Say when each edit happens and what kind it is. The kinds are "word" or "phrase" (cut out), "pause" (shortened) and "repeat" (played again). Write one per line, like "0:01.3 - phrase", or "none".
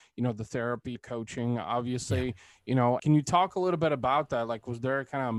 0:00.9 - word
0:03.0 - word